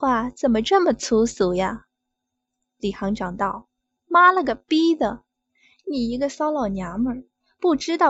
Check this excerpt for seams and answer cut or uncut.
uncut